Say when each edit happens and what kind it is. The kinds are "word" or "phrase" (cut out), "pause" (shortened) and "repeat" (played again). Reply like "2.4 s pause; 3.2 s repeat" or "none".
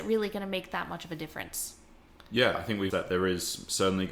2.9 s word